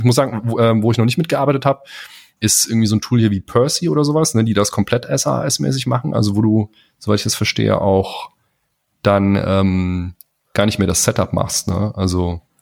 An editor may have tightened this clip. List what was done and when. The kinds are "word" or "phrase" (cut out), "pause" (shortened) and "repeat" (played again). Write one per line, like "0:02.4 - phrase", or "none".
none